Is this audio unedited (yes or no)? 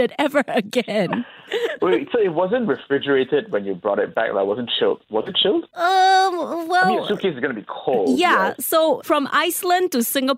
yes